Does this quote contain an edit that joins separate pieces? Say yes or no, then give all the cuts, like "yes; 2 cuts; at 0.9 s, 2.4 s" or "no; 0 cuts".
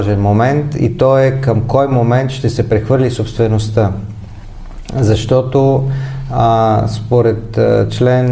no; 0 cuts